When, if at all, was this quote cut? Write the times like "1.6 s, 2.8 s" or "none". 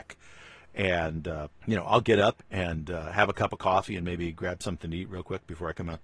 1.6 s, 2.4 s